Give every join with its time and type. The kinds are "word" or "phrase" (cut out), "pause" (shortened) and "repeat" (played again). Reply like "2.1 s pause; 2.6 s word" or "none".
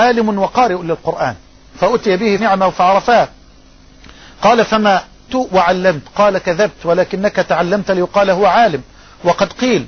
2.4 s word; 5.3 s phrase